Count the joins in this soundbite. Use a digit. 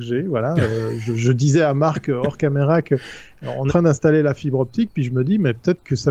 1